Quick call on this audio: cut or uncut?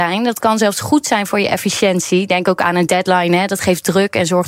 uncut